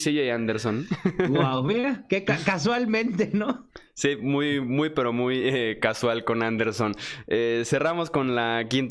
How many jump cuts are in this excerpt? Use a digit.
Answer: 0